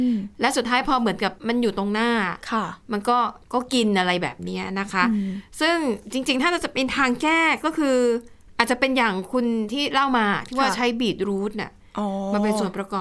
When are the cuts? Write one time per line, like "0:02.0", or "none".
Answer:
0:01.4
0:03.4